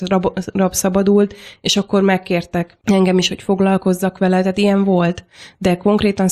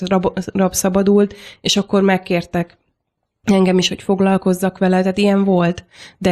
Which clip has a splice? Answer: first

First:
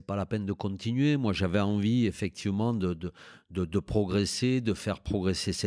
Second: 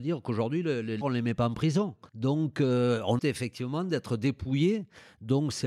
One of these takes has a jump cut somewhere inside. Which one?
second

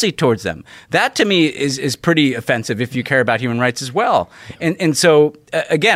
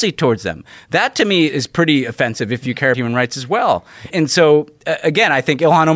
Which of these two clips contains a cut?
second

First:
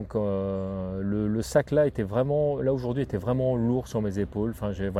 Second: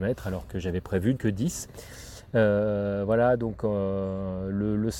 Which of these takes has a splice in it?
second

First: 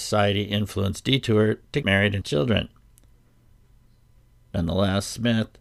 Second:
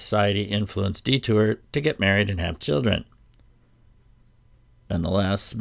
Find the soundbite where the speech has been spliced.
first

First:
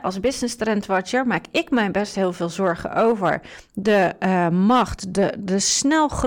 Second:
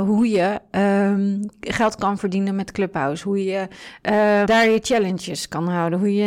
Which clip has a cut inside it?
second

